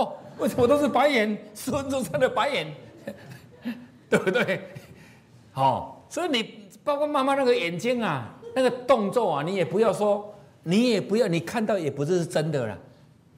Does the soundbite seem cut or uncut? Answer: uncut